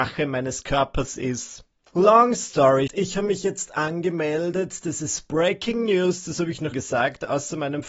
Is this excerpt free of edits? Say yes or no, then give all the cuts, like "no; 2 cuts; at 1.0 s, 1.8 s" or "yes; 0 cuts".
no; 2 cuts; at 2.9 s, 6.7 s